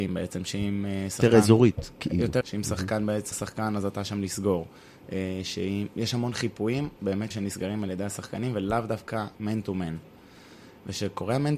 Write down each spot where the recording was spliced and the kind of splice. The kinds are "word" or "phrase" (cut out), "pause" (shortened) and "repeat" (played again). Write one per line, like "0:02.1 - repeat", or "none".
0:02.4 - word
0:03.3 - word
0:07.0 - word
0:07.3 - word